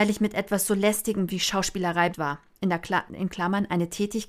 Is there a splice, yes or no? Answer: yes